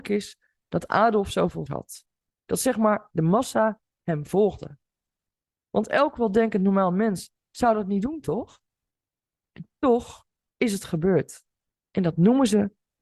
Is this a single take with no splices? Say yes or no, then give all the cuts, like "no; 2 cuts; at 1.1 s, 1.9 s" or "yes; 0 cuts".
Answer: no; 1 cut; at 1.7 s